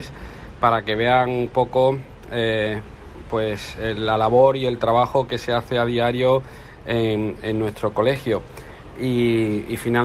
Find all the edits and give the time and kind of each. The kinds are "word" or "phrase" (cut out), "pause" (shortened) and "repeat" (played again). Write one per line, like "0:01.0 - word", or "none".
none